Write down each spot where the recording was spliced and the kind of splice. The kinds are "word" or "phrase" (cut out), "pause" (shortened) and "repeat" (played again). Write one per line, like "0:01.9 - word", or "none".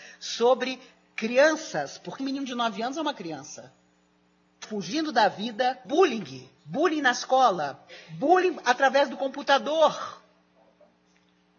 0:02.2 - word
0:04.6 - word
0:05.8 - word
0:06.6 - pause

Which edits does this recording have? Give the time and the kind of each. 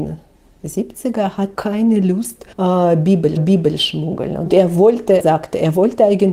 0:01.6 - word
0:02.5 - pause
0:03.4 - repeat
0:05.2 - word

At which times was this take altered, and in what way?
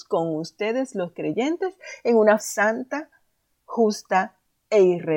0:02.4 - word

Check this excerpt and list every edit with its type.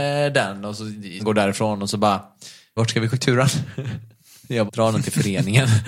0:01.2 - word
0:02.8 - word
0:03.1 - word
0:04.7 - word

